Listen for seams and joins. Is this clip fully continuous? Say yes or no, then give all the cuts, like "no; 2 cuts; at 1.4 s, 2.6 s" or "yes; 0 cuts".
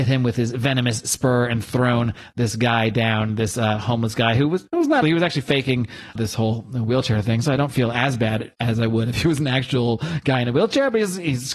no; 2 cuts; at 5.0 s, 6.2 s